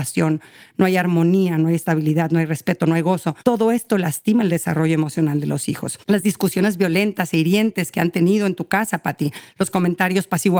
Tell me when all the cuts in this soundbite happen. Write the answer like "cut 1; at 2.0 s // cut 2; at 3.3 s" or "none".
cut 1; at 3.4 s // cut 2; at 6.0 s